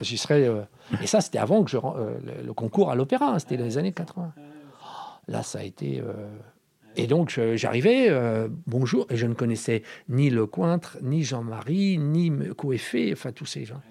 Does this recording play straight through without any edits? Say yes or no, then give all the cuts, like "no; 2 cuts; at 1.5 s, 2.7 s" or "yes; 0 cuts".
yes; 0 cuts